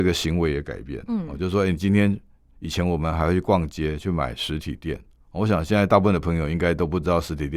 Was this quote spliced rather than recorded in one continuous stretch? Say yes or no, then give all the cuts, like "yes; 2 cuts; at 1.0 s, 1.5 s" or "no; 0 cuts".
no; 0 cuts